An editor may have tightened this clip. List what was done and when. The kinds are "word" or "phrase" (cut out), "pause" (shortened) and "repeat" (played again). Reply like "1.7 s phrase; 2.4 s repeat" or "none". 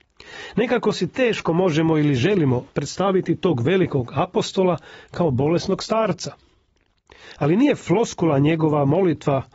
2.7 s pause